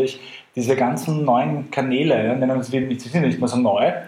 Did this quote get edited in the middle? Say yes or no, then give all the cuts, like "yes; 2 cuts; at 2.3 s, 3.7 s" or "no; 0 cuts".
no; 0 cuts